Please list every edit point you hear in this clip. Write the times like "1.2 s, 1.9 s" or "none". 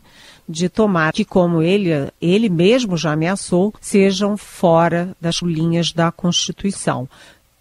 1.1 s, 3.8 s, 5.4 s